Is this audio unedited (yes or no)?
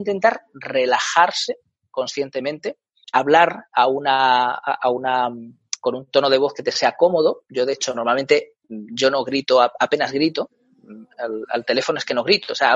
no